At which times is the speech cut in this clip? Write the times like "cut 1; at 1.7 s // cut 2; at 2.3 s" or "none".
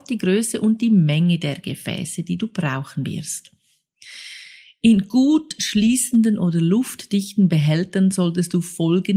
none